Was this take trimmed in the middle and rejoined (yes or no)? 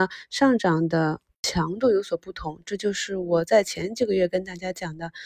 no